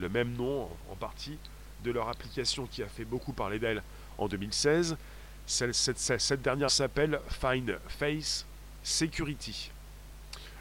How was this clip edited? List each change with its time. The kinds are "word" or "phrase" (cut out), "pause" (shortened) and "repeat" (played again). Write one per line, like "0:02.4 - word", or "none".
0:06.7 - word